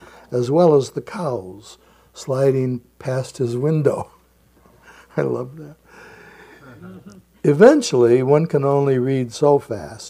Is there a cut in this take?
no; 0 cuts

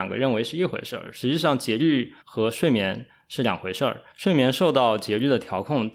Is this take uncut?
no; 2 cuts; at 2.2 s, 4.1 s

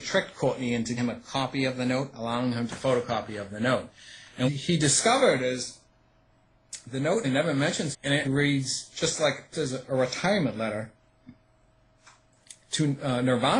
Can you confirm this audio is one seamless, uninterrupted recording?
no; 8 cuts; at 1.0 s, 2.7 s, 4.5 s, 7.2 s, 7.9 s, 8.2 s, 9.5 s, 9.9 s

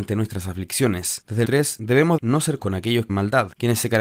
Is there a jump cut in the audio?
yes; 4 cuts; at 1.4 s, 2.2 s, 2.6 s, 3.1 s

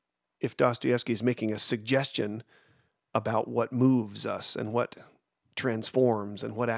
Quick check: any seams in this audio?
no; 0 cuts

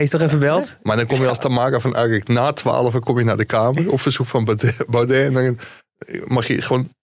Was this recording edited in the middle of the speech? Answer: no; 0 cuts

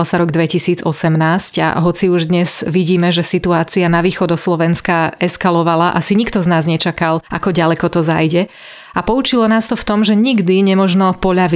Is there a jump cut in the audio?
yes; 1 cut; at 7.3 s

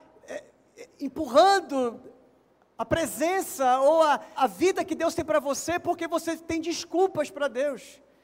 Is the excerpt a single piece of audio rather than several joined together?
no; 1 cut; at 4.4 s

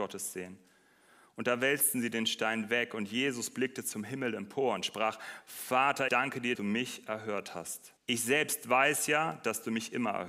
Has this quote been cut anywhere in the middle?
yes; 3 cuts; at 6.1 s, 6.5 s, 8.0 s

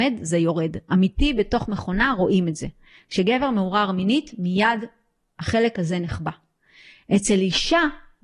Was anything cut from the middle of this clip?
no; 0 cuts

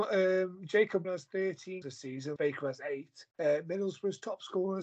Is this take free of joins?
no; 4 cuts; at 1.0 s, 1.8 s, 2.4 s, 3.3 s

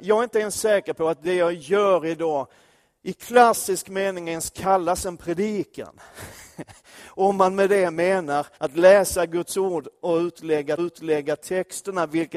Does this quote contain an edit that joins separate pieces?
yes; 2 cuts; at 8.5 s, 10.8 s

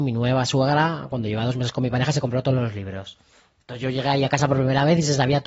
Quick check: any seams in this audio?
no; 0 cuts

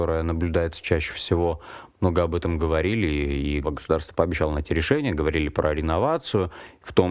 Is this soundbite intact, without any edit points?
no; 1 cut; at 3.6 s

